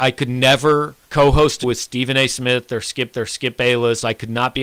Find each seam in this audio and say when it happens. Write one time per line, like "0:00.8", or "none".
0:01.0
0:01.6
0:03.1